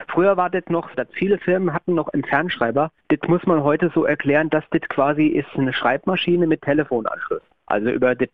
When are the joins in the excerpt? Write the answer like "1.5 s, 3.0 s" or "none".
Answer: 0.9 s, 3.0 s